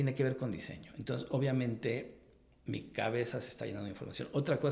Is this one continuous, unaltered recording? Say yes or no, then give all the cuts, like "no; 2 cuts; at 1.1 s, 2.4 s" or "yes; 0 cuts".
yes; 0 cuts